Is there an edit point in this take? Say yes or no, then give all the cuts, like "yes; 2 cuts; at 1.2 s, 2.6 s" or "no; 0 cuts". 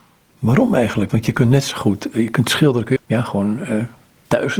yes; 1 cut; at 3.0 s